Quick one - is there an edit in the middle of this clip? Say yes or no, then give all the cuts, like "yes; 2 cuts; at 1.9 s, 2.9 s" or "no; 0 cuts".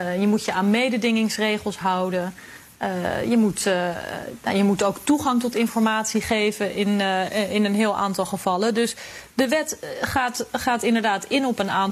no; 0 cuts